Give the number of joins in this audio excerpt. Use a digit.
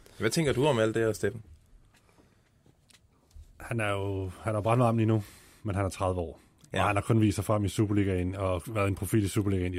0